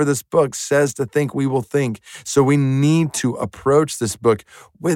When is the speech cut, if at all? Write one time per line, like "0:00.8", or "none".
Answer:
none